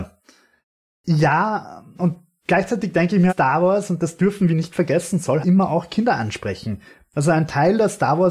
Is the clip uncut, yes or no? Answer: no